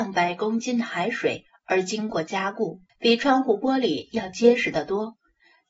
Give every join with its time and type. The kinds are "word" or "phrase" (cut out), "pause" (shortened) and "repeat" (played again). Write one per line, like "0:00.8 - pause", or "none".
0:02.9 - pause